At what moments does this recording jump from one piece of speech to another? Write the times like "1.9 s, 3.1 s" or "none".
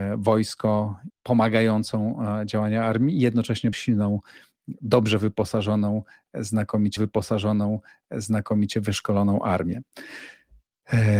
1.1 s, 3.7 s, 7.0 s